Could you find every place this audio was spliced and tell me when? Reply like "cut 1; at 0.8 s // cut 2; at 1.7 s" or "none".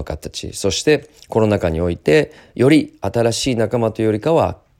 none